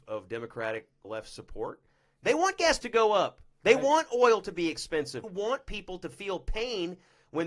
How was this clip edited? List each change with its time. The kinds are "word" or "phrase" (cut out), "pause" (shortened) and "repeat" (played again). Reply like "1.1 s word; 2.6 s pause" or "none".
1.0 s word; 2.8 s word; 5.2 s word